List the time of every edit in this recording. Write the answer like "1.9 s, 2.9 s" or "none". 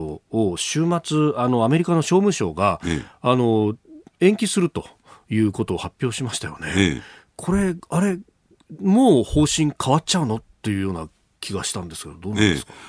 none